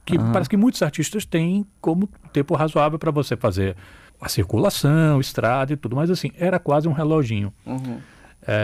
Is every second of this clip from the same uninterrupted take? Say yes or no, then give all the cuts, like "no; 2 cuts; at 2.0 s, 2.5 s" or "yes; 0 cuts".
no; 1 cut; at 4.1 s